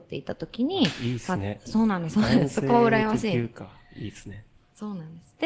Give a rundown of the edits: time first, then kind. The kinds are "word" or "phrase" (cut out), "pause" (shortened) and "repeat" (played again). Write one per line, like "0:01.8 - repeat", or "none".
none